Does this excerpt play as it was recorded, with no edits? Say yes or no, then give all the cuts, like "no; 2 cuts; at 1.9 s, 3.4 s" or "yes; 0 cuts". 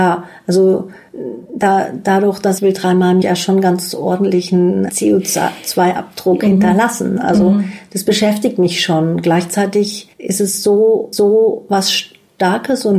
no; 5 cuts; at 2.6 s, 3.2 s, 4.9 s, 10.1 s, 11.1 s